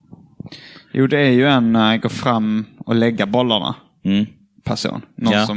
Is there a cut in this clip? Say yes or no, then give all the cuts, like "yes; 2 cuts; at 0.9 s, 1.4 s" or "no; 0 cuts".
no; 0 cuts